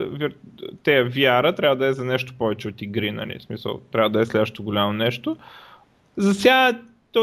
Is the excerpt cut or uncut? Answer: cut